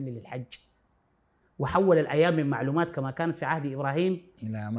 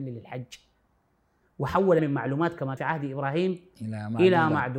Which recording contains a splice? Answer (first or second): second